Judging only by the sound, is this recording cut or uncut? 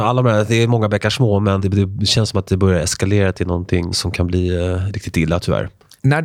cut